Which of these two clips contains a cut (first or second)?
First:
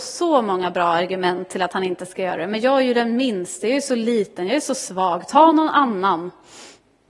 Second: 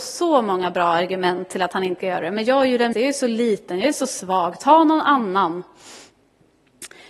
second